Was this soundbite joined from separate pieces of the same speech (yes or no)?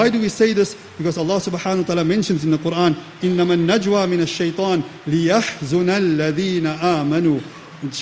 no